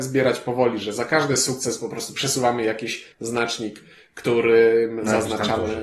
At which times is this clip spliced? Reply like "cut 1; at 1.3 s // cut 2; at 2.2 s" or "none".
cut 1; at 3.1 s